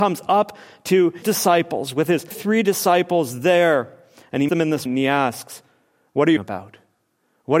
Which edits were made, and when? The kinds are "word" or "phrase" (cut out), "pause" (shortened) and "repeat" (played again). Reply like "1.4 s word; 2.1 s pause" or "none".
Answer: 1.2 s word; 2.3 s word; 4.5 s word; 4.9 s word; 6.4 s word